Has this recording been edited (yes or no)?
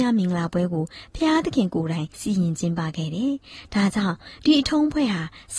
yes